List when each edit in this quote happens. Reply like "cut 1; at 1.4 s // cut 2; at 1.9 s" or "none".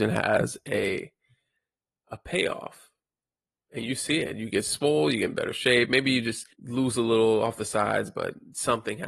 cut 1; at 2.1 s // cut 2; at 6.5 s